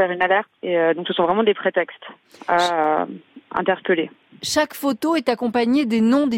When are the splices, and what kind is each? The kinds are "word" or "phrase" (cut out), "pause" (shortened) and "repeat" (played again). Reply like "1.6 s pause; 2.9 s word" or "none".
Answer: none